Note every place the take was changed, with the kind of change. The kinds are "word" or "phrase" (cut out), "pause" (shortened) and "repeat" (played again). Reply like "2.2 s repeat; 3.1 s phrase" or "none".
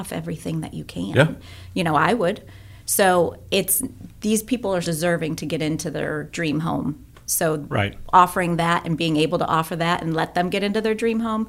4.8 s word